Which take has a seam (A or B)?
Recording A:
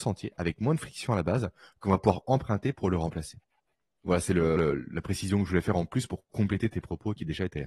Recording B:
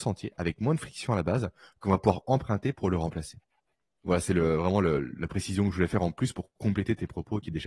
A